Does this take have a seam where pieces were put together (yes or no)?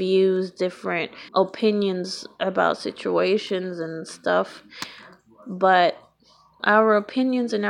yes